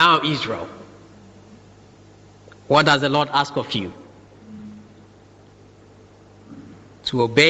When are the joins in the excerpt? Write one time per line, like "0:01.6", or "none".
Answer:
none